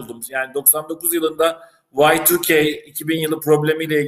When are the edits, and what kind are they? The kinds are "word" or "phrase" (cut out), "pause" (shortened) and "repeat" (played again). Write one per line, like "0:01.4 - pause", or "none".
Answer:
none